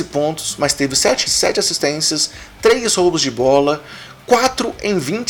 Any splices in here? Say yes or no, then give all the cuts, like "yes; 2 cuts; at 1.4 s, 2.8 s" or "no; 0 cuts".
yes; 1 cut; at 1.3 s